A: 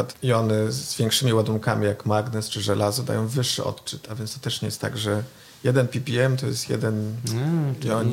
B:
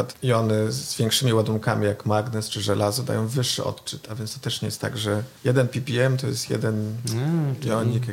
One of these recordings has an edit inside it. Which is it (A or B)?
B